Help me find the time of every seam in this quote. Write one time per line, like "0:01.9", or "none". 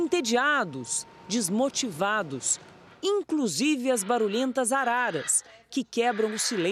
none